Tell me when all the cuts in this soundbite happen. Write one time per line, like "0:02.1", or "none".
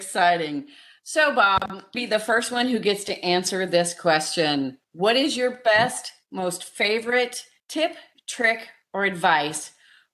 0:01.9
0:04.8
0:07.6